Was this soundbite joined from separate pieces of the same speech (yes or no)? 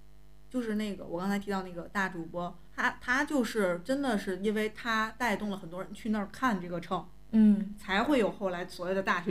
yes